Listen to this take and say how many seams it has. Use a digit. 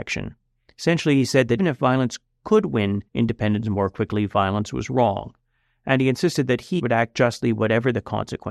3